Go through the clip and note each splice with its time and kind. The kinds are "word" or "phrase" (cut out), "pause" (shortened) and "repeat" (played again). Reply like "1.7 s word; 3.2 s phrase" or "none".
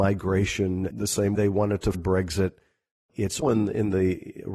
0.9 s word; 1.4 s word; 1.9 s word; 3.4 s word